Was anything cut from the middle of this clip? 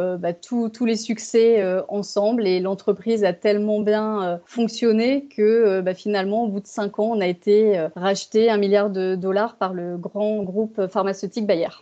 no; 0 cuts

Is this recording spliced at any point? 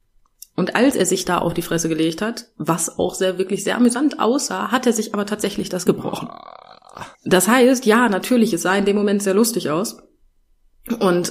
yes; 2 cuts; at 5.9 s, 7.1 s

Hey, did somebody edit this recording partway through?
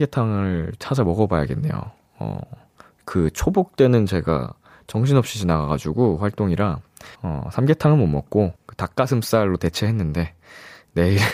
yes; 2 cuts; at 7.1 s, 8.6 s

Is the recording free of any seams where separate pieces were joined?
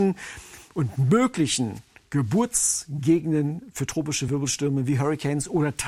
yes; 0 cuts

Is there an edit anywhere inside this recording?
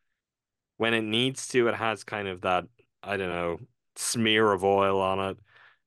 no; 0 cuts

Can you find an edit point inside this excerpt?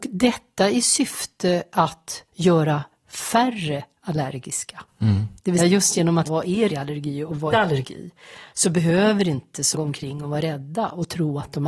yes; 6 cuts; at 2.3 s, 5.6 s, 6.2 s, 6.7 s, 7.5 s, 9.7 s

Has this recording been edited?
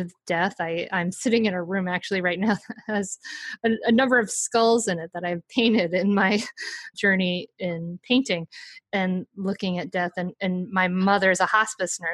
no; 0 cuts

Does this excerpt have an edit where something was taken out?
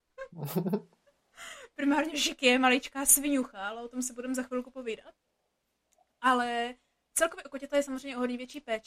yes; 1 cut; at 2.1 s

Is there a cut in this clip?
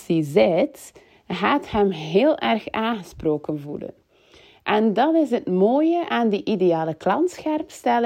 no; 0 cuts

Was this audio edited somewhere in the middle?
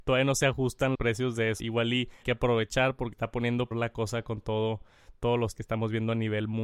yes; 6 cuts; at 0.9 s, 1.6 s, 2.2 s, 3.1 s, 3.7 s, 5.5 s

